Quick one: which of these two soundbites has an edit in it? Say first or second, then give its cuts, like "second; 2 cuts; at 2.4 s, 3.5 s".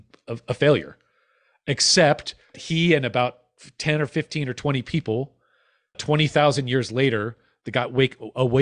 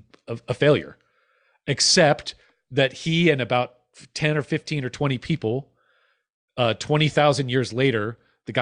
first; 2 cuts; at 2.5 s, 5.9 s